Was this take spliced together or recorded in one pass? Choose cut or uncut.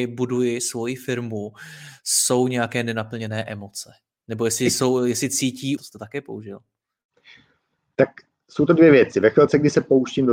cut